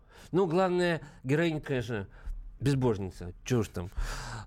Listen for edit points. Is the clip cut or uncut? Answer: cut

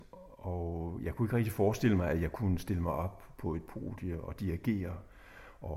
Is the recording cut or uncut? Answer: uncut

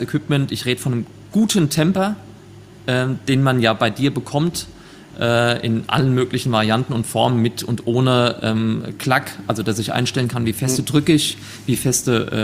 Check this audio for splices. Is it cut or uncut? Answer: uncut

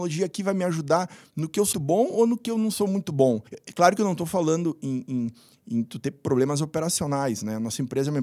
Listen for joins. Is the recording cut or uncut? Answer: cut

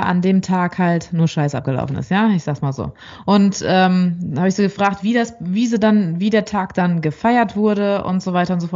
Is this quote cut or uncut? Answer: uncut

